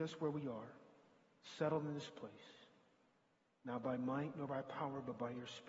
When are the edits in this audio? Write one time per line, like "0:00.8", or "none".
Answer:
none